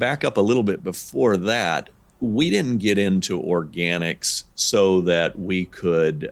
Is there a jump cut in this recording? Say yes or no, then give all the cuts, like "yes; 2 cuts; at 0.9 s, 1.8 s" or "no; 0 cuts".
no; 0 cuts